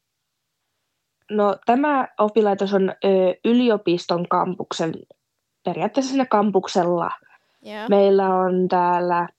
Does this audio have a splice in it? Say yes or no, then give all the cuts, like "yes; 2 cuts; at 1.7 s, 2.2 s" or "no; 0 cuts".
no; 0 cuts